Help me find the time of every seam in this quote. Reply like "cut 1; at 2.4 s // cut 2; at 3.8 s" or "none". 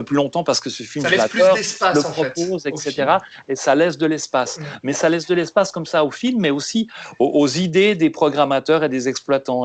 none